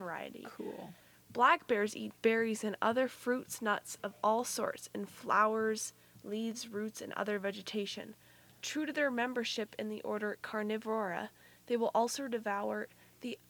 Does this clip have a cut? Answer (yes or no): no